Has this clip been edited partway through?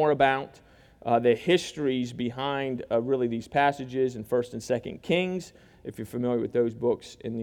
no; 0 cuts

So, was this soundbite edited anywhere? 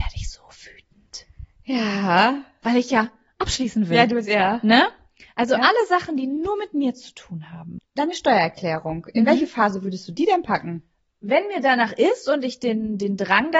no; 0 cuts

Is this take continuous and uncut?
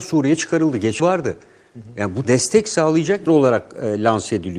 no; 3 cuts; at 1.0 s, 2.2 s, 3.3 s

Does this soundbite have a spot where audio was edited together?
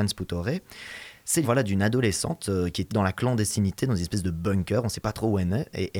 yes; 2 cuts; at 1.4 s, 2.9 s

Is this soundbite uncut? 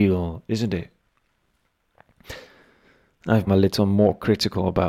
no; 1 cut; at 3.5 s

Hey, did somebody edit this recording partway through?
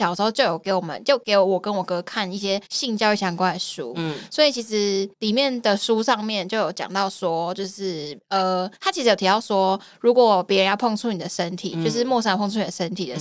yes; 3 cuts; at 2.7 s, 5.1 s, 8.7 s

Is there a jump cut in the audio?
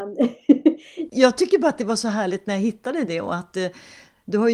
no; 0 cuts

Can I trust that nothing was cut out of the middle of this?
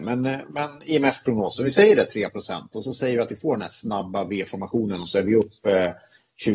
yes; 0 cuts

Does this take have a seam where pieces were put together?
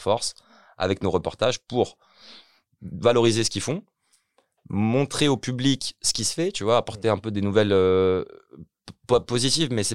no; 0 cuts

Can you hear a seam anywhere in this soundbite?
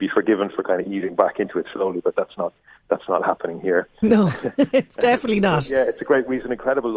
no; 0 cuts

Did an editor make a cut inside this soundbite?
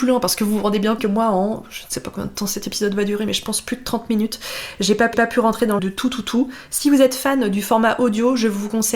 yes; 3 cuts; at 1.0 s, 5.1 s, 5.8 s

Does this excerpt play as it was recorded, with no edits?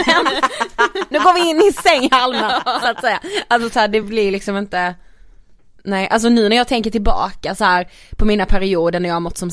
yes; 0 cuts

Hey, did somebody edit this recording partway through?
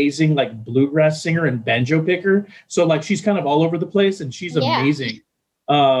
no; 0 cuts

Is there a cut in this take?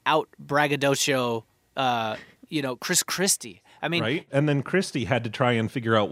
no; 0 cuts

